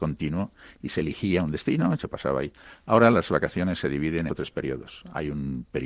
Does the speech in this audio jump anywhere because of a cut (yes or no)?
yes